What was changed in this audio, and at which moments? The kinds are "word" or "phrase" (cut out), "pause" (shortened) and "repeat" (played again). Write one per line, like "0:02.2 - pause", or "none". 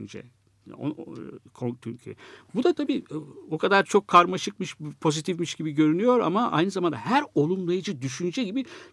none